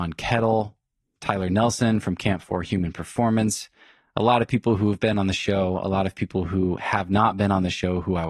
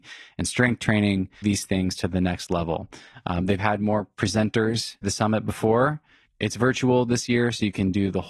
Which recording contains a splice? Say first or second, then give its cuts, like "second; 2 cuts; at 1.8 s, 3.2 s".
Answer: second; 3 cuts; at 1.4 s, 3.6 s, 5.0 s